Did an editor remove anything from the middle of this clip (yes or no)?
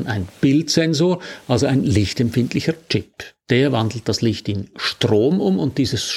no